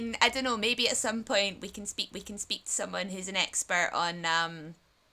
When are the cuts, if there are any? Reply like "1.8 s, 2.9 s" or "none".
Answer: 2.1 s